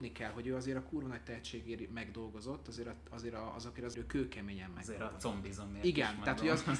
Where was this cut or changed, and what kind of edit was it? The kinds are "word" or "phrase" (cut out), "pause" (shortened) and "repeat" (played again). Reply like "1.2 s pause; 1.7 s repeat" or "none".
3.9 s word